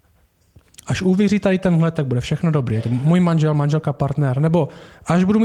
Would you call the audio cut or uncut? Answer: uncut